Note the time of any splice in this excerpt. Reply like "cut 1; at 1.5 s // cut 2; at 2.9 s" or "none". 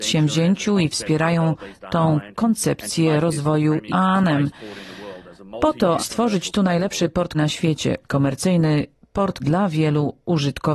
cut 1; at 3.9 s // cut 2; at 6.0 s // cut 3; at 7.3 s // cut 4; at 8.0 s // cut 5; at 9.4 s